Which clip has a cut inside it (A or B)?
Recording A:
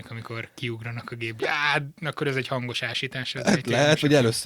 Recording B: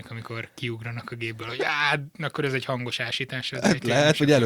A